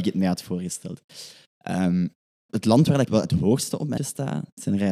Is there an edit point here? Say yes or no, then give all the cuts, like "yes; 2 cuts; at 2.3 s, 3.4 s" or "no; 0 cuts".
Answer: yes; 3 cuts; at 2.5 s, 3.1 s, 4.0 s